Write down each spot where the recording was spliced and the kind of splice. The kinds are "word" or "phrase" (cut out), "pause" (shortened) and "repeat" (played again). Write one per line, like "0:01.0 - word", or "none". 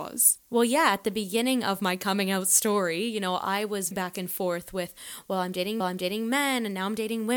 0:03.9 - word
0:05.8 - repeat